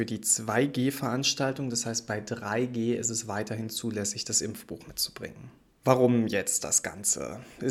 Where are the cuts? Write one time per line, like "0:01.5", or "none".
none